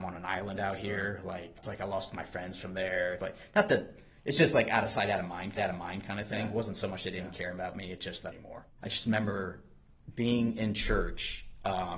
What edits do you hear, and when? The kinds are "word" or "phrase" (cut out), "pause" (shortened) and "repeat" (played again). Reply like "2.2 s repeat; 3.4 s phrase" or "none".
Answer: 1.6 s word; 3.2 s word; 4.2 s pause; 5.6 s repeat; 8.3 s phrase; 8.7 s pause